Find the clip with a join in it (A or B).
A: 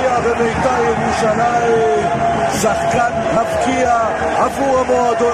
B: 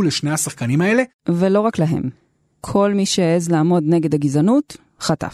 A